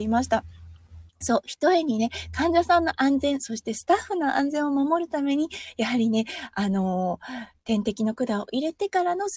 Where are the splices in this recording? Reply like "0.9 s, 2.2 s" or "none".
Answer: 1.1 s